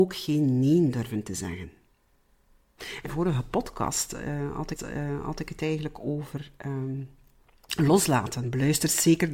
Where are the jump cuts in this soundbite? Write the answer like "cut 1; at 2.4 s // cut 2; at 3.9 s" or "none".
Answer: cut 1; at 3.0 s // cut 2; at 4.8 s